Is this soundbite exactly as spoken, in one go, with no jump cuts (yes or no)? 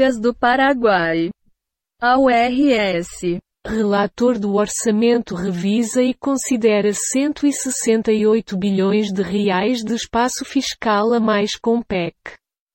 yes